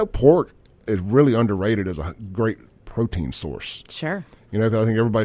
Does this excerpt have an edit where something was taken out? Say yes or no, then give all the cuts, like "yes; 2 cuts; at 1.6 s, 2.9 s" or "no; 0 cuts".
no; 0 cuts